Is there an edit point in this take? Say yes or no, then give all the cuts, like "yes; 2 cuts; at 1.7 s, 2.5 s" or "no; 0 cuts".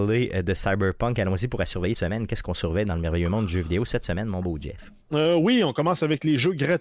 yes; 2 cuts; at 1.9 s, 5.0 s